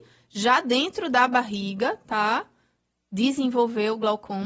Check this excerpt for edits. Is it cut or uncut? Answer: uncut